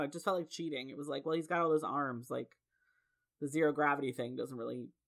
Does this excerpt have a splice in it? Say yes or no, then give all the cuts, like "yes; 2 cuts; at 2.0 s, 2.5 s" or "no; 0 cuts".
no; 0 cuts